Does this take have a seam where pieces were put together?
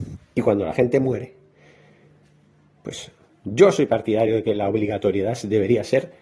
no; 0 cuts

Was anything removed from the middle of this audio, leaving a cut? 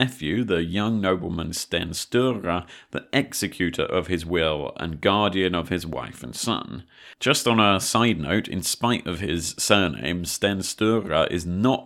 no; 0 cuts

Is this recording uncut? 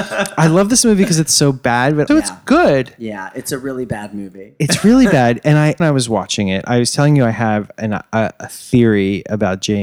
no; 2 cuts; at 2.1 s, 5.8 s

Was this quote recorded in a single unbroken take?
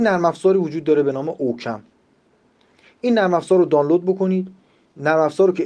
yes; 0 cuts

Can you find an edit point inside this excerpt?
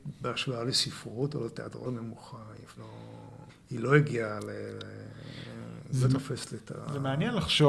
yes; 3 cuts; at 1.8 s, 2.8 s, 3.5 s

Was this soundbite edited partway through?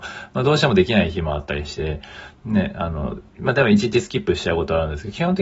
yes; 1 cut; at 3.3 s

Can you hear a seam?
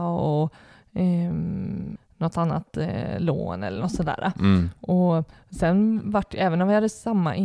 no; 0 cuts

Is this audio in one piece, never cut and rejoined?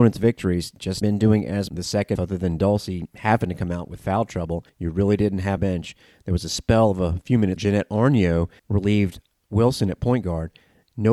no; 6 cuts; at 1.0 s, 1.7 s, 2.2 s, 4.7 s, 5.6 s, 7.6 s

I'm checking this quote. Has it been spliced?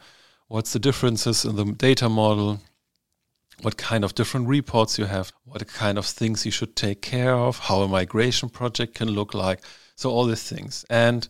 yes; 1 cut; at 5.3 s

